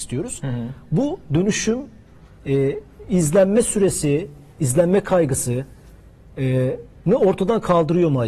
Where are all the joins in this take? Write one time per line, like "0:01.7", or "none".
none